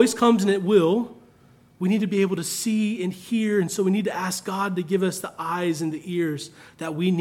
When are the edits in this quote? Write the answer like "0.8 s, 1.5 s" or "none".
none